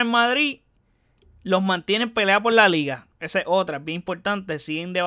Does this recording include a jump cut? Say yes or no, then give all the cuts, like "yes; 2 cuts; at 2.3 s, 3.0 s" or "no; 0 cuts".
no; 0 cuts